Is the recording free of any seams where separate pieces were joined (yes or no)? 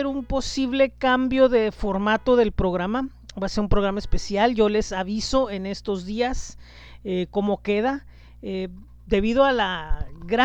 yes